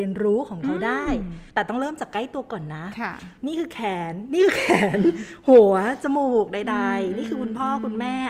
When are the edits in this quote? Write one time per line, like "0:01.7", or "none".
0:01.5
0:03.4